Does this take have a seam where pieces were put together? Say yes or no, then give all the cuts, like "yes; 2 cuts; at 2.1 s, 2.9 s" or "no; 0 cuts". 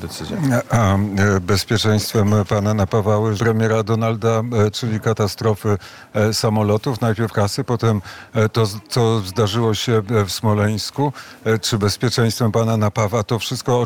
yes; 3 cuts; at 3.4 s, 4.7 s, 7.3 s